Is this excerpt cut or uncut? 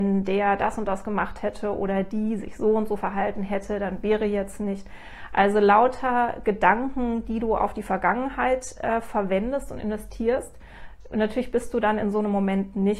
uncut